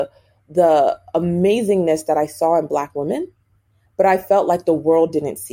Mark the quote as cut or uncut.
uncut